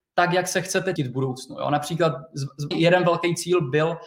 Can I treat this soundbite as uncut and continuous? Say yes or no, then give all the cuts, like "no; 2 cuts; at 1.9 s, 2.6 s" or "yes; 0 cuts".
no; 2 cuts; at 1.0 s, 2.7 s